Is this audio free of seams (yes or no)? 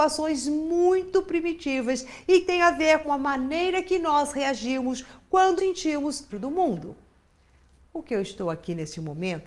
no